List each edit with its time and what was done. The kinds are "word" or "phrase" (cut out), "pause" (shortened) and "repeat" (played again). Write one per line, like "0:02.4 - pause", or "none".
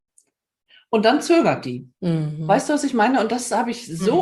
0:02.0 - pause